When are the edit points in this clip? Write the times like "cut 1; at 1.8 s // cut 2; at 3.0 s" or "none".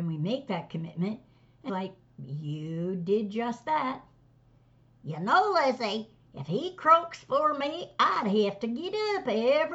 cut 1; at 1.7 s